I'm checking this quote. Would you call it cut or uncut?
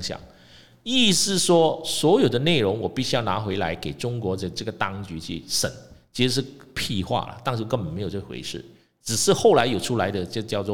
uncut